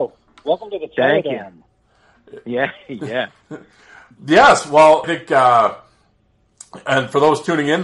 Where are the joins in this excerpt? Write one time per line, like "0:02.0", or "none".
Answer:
0:05.0